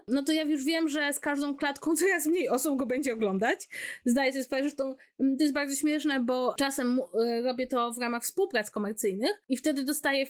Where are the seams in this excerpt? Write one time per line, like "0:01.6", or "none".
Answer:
none